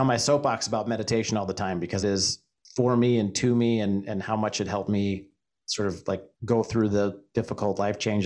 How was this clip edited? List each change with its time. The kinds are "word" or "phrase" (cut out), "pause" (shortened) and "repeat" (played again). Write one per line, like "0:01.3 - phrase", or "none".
0:02.0 - phrase
0:06.3 - pause